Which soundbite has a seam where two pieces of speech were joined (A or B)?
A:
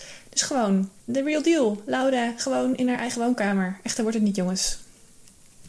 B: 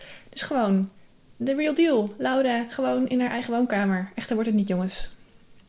A